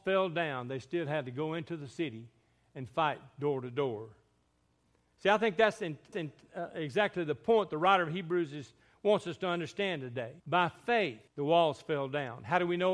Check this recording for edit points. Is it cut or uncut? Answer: cut